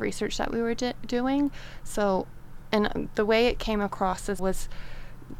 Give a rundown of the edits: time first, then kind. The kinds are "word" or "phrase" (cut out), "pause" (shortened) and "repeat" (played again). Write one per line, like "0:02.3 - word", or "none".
0:04.4 - word